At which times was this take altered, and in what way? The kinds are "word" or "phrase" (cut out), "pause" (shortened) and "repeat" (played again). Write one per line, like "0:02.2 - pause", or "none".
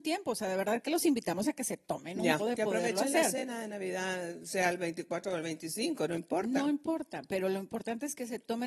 0:02.4 - word